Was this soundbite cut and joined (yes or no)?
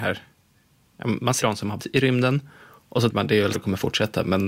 yes